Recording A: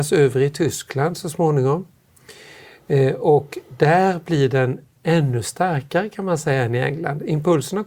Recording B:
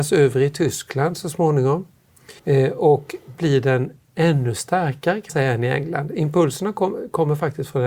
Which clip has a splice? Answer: B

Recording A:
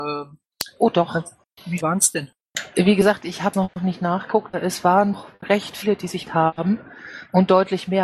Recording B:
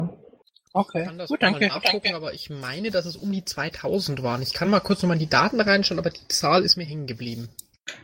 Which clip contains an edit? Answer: A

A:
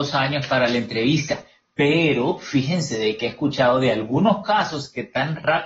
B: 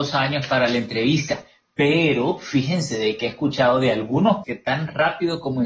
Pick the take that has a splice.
B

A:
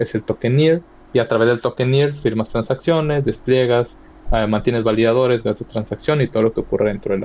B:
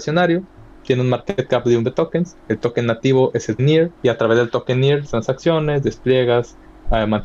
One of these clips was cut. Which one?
B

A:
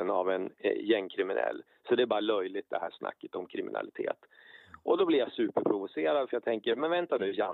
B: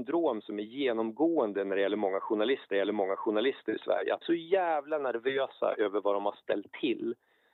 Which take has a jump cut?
B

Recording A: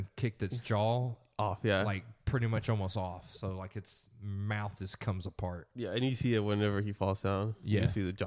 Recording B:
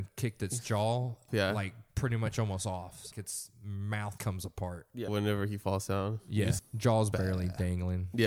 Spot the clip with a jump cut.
B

